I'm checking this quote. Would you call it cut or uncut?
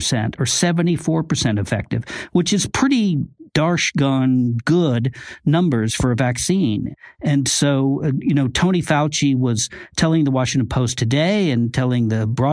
cut